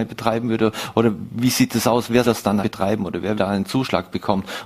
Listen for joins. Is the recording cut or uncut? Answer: cut